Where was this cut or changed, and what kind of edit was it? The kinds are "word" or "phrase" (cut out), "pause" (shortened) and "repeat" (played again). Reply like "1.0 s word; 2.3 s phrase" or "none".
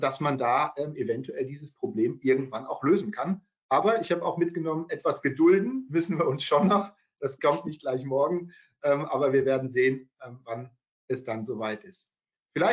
none